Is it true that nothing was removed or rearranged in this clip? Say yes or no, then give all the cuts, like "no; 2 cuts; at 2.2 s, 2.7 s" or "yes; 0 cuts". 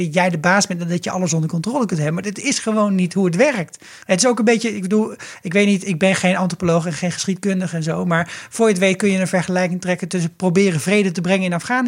no; 1 cut; at 4.0 s